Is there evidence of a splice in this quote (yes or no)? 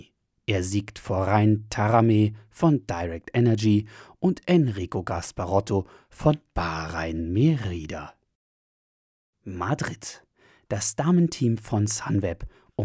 no